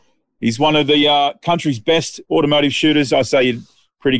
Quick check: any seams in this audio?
no; 0 cuts

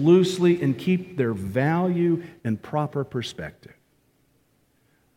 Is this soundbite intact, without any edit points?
yes; 0 cuts

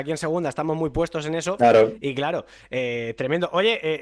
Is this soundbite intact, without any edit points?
yes; 0 cuts

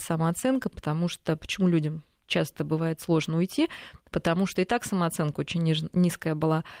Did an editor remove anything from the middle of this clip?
no; 0 cuts

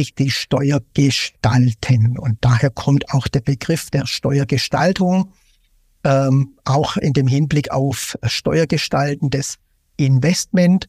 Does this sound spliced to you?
no; 0 cuts

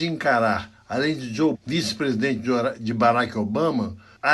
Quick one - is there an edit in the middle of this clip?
yes; 1 cut; at 1.5 s

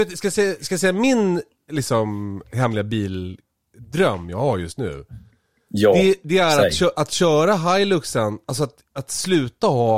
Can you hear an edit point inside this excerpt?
no; 0 cuts

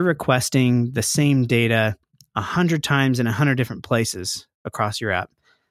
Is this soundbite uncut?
yes; 0 cuts

